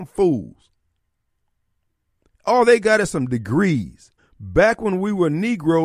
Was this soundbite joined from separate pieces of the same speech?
yes; 1 cut; at 4.2 s

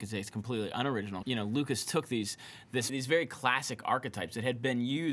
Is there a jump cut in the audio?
yes; 2 cuts; at 1.2 s, 2.9 s

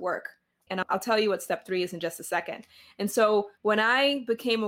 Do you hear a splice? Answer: yes; 1 cut; at 3.5 s

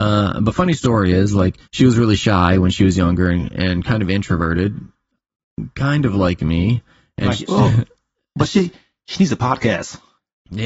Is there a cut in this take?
yes; 1 cut; at 1.7 s

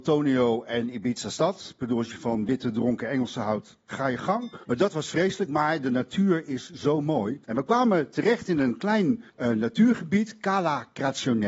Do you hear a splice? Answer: yes; 3 cuts; at 4.6 s, 7.4 s, 9.3 s

